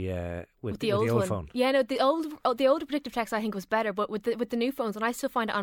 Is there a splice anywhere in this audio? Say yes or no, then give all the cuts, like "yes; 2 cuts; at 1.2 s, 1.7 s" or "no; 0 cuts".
no; 0 cuts